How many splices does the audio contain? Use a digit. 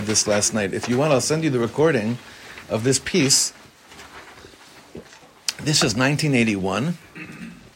0